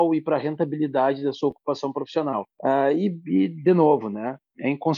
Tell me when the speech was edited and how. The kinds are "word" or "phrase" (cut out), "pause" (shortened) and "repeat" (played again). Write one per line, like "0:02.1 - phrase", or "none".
0:02.5 - pause